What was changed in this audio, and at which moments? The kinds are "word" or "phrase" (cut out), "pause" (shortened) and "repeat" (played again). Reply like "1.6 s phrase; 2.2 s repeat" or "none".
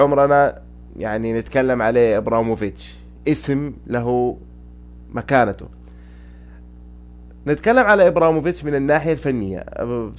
none